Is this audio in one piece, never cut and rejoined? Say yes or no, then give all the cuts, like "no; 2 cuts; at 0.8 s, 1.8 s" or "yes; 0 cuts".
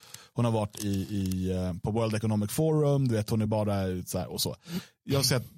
yes; 0 cuts